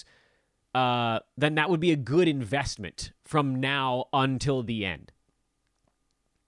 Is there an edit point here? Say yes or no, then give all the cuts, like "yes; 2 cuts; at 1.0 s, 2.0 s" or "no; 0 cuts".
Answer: no; 0 cuts